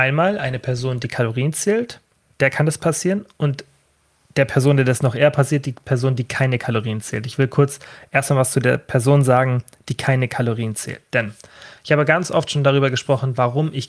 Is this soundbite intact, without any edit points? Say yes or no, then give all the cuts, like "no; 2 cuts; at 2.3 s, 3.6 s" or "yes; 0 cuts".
yes; 0 cuts